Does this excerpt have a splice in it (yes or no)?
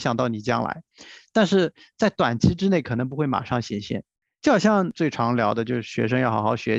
no